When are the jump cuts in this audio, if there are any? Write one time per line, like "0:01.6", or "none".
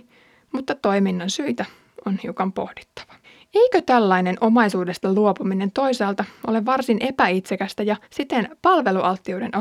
0:03.2
0:08.0